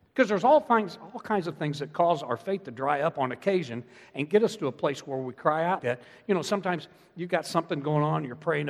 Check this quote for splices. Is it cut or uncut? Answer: cut